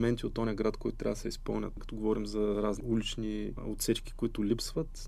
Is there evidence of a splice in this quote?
no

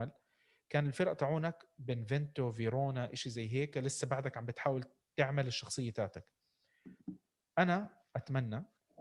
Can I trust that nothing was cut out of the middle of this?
yes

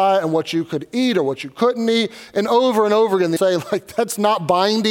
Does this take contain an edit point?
yes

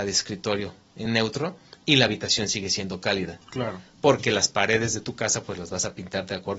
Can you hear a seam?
no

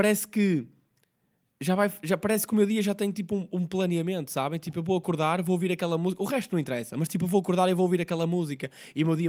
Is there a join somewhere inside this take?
no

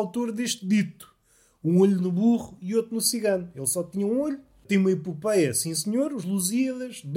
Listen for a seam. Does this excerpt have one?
no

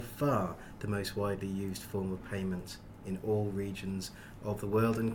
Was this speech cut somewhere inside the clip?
no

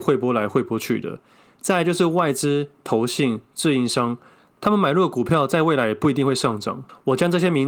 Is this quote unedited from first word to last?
yes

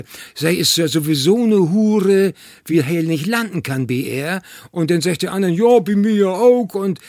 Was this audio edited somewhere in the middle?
no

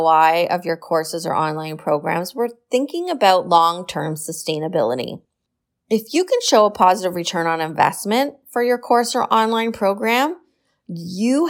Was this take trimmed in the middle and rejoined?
no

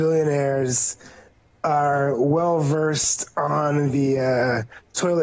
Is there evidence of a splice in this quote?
no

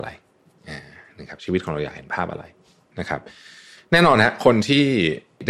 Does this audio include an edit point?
no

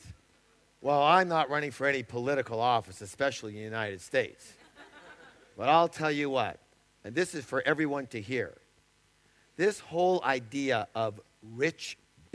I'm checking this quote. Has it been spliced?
no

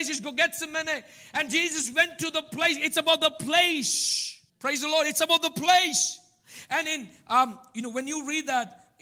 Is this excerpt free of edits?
no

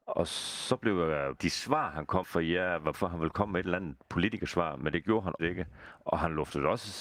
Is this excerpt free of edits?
no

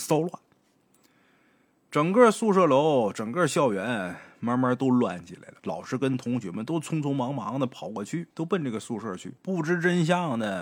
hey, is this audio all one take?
no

